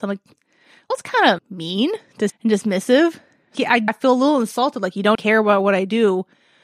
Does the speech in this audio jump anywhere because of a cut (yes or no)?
yes